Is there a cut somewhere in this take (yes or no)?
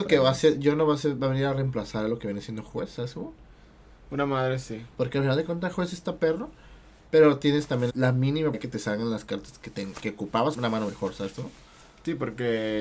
yes